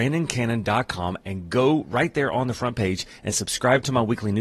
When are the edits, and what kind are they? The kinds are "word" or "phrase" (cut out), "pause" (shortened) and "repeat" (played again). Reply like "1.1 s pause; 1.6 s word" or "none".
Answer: none